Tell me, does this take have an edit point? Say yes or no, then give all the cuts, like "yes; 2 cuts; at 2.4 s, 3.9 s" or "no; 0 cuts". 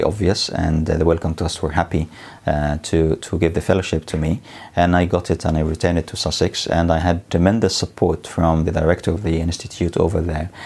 no; 0 cuts